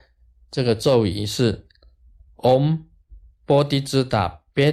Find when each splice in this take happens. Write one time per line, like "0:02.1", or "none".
none

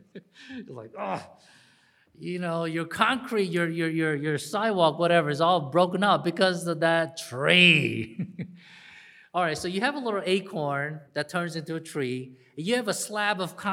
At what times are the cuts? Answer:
0:11.1

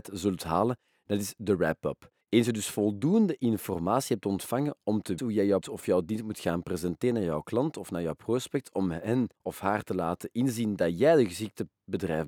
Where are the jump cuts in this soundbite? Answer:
0:02.2
0:05.2
0:05.6
0:09.3

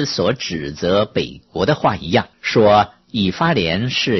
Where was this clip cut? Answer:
0:02.3

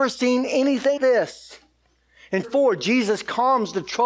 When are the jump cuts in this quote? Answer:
0:01.0
0:02.4

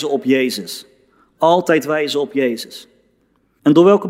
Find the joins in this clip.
none

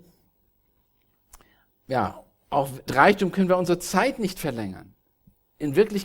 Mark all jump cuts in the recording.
0:02.9

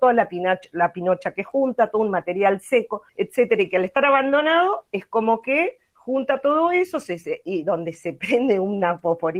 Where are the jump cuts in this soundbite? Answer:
0:03.1

